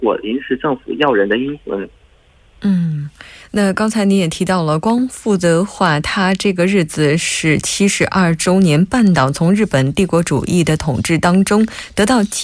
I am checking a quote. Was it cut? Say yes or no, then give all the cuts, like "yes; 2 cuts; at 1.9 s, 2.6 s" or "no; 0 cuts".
yes; 1 cut; at 3.4 s